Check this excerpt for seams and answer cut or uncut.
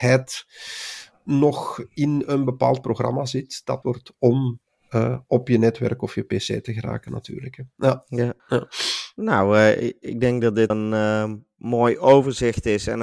cut